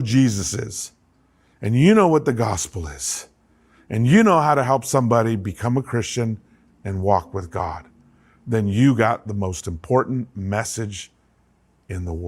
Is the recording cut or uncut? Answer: uncut